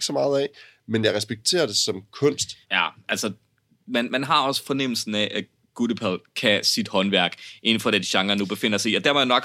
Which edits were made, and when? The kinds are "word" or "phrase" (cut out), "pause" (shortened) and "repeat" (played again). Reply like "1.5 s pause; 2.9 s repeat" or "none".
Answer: 2.6 s pause